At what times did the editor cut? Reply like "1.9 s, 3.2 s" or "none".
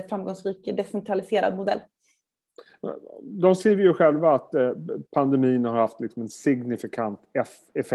5.1 s